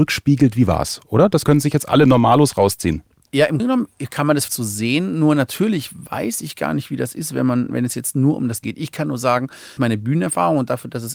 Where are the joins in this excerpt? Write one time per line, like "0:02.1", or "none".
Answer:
0:01.4
0:03.6
0:04.5
0:08.6
0:09.8